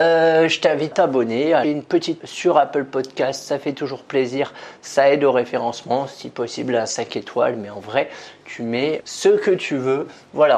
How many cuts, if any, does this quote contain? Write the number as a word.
four